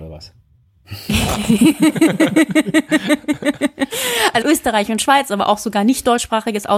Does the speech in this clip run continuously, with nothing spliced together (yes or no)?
no